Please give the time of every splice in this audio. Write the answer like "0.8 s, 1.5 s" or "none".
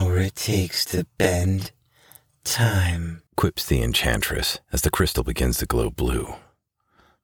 3.3 s, 4.6 s